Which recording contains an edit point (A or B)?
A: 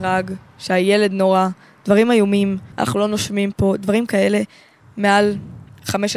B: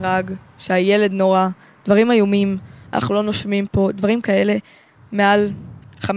A